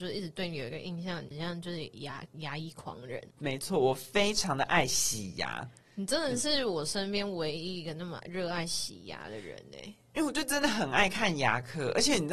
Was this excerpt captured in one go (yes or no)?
yes